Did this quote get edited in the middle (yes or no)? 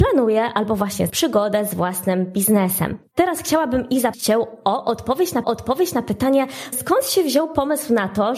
yes